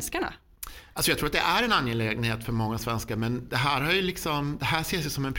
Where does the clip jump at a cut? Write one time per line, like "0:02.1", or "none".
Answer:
none